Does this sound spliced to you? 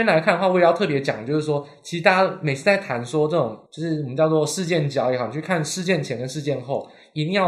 yes; 1 cut; at 3.7 s

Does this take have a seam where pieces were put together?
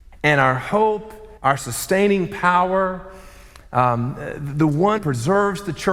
yes; 2 cuts; at 1.4 s, 5.0 s

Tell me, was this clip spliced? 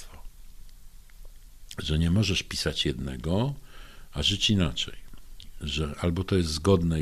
no; 0 cuts

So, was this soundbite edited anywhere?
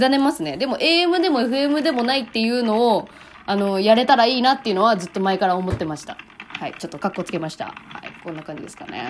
no; 0 cuts

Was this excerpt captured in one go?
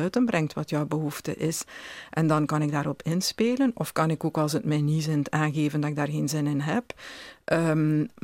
yes; 0 cuts

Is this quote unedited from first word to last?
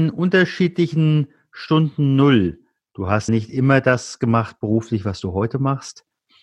no; 1 cut; at 3.3 s

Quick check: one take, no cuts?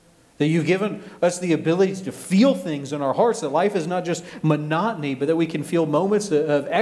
yes; 0 cuts

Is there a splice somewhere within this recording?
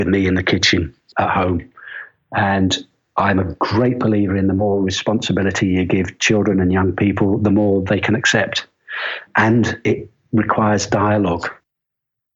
no; 0 cuts

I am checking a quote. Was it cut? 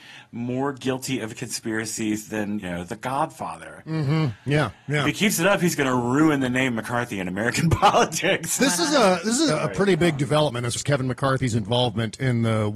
yes; 4 cuts; at 2.6 s, 8.6 s, 9.5 s, 10.8 s

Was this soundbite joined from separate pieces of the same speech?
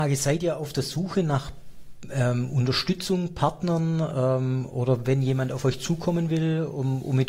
no; 0 cuts

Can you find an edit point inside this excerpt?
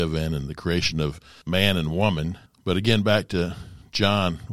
no; 0 cuts

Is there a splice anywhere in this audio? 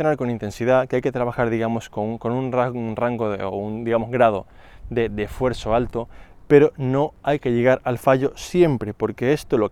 no; 0 cuts

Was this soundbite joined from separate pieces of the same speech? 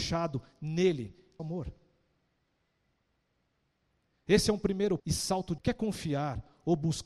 yes; 3 cuts; at 1.4 s, 5.0 s, 5.6 s

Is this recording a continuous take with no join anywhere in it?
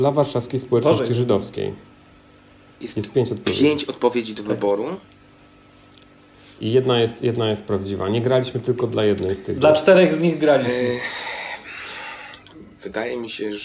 yes; 0 cuts

